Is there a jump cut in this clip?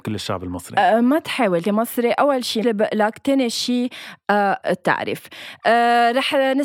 yes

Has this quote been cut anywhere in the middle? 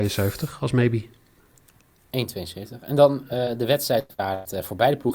no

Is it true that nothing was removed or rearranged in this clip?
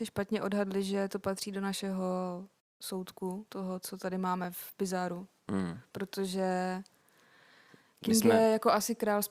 yes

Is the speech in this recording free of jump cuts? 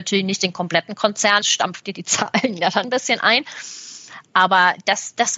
no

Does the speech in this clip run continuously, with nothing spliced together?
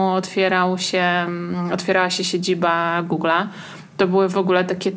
yes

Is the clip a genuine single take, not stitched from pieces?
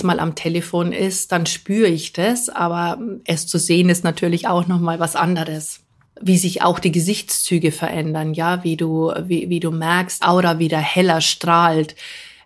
no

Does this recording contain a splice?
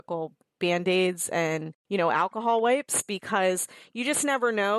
yes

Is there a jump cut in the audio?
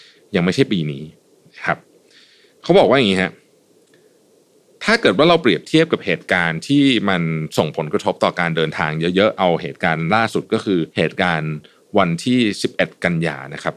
yes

